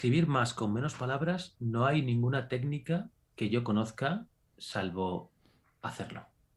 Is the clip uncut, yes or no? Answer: yes